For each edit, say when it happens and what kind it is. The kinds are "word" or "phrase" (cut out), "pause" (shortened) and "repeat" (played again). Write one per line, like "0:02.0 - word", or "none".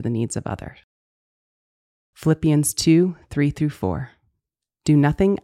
none